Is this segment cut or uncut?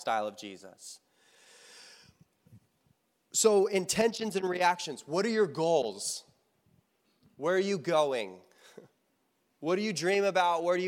uncut